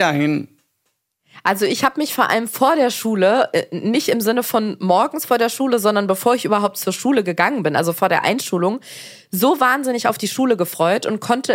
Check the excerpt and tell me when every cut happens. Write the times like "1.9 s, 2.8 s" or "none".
none